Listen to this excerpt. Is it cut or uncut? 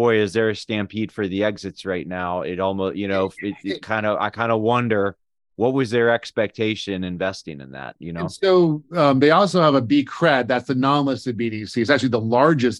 uncut